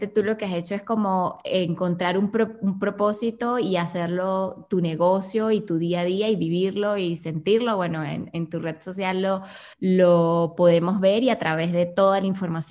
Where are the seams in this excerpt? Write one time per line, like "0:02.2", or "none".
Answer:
0:09.7